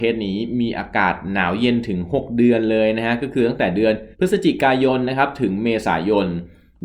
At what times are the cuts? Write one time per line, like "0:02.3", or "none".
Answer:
0:04.1